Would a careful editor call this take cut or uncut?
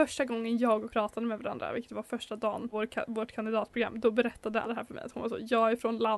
cut